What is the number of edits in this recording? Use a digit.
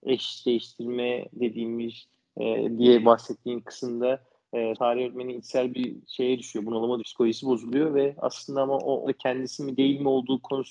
3